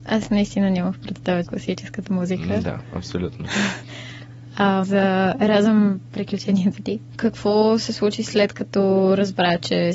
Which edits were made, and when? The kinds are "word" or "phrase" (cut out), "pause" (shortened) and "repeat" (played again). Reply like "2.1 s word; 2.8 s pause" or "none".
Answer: 1.4 s phrase; 4.8 s phrase